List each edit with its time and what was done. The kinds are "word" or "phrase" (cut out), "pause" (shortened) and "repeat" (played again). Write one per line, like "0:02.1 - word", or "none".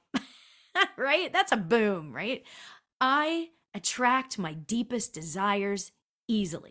none